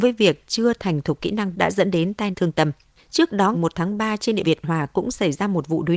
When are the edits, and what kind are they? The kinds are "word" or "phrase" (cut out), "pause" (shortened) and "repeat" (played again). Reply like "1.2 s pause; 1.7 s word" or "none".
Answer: 1.5 s word; 2.3 s word; 3.0 s pause; 3.5 s word; 4.4 s phrase